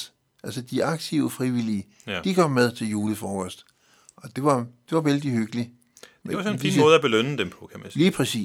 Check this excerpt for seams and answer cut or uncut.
uncut